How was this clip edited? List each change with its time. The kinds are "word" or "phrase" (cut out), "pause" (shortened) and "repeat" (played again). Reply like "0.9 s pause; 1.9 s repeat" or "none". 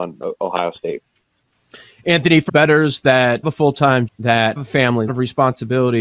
2.5 s word; 3.4 s word; 4.1 s word; 4.6 s word; 5.1 s word